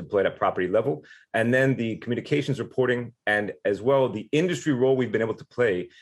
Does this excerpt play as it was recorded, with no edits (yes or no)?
yes